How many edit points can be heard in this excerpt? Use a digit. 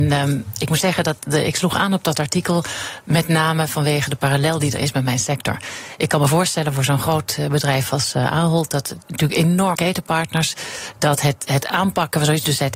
1